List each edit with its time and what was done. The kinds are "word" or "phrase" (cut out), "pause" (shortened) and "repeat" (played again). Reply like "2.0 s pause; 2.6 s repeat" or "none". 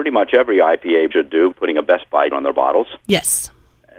1.1 s word; 1.5 s word; 2.3 s word

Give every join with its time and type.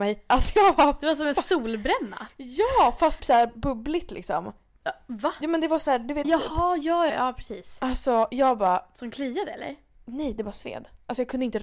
3.2 s word; 6.2 s word; 7.1 s word

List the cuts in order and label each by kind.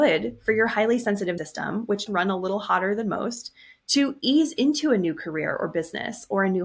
1.4 s word; 2.1 s word

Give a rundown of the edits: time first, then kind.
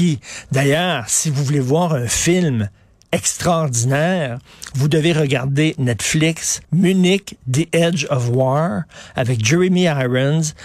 6.6 s pause

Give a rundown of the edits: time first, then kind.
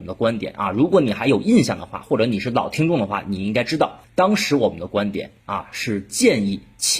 4.0 s pause; 5.4 s pause

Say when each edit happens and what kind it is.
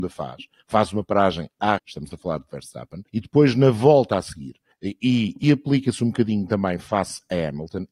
1.8 s phrase; 3.1 s pause; 4.7 s pause; 5.4 s word

